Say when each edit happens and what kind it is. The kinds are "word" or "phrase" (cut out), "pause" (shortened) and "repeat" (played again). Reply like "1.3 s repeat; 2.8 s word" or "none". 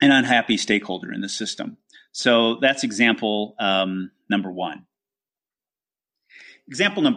none

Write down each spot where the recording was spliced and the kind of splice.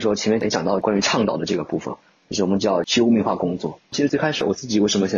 3.8 s pause

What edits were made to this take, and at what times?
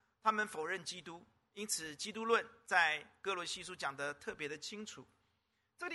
none

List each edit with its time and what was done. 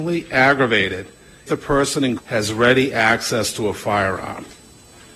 1.5 s word; 2.2 s word

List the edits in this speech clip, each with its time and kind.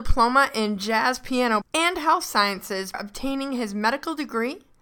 1.6 s word; 2.9 s word

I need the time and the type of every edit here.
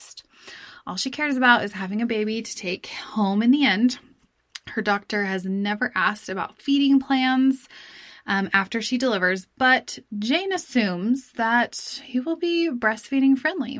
none

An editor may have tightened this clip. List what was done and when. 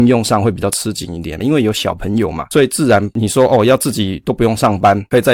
1.4 s phrase

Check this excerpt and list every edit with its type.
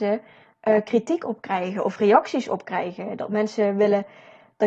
none

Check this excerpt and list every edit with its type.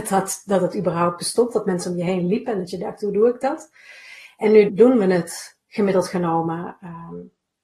4.7 s word

